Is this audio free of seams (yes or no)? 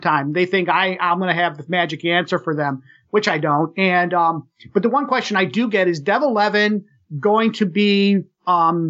yes